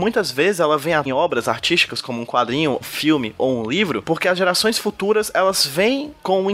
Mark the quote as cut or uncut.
cut